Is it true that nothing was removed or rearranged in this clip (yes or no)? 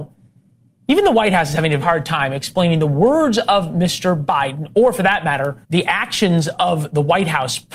no